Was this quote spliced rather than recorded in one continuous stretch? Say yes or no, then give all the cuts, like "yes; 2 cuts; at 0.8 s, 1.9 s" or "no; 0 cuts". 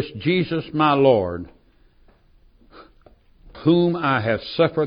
yes; 1 cut; at 3.5 s